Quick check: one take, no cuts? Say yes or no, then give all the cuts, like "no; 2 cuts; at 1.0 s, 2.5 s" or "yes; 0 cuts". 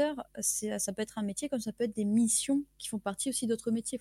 yes; 0 cuts